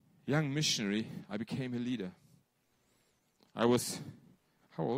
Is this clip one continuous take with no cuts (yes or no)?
yes